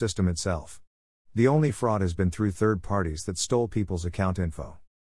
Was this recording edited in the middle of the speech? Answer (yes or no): no